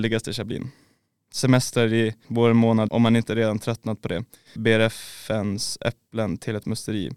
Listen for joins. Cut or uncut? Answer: cut